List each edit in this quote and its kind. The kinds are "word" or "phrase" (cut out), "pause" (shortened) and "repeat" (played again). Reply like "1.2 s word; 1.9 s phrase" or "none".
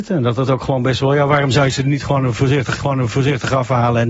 2.7 s repeat